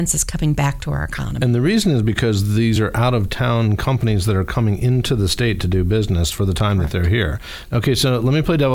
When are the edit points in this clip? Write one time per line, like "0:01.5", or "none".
none